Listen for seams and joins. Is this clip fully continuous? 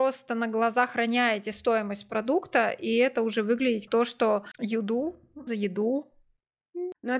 no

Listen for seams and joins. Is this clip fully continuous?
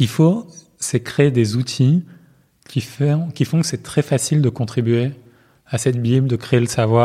yes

